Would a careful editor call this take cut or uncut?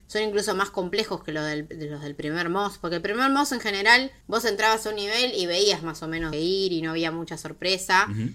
cut